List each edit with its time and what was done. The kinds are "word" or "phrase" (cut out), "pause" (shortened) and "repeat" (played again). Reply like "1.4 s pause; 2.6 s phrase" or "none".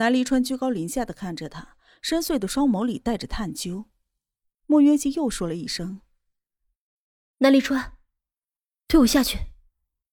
none